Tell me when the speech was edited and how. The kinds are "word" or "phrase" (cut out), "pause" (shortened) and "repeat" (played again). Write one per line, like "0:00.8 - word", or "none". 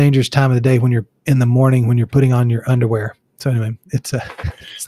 0:01.2 - pause